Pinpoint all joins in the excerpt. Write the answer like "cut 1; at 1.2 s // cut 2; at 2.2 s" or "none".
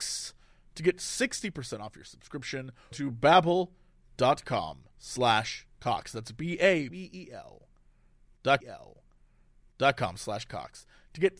cut 1; at 2.9 s // cut 2; at 4.9 s // cut 3; at 6.9 s // cut 4; at 8.6 s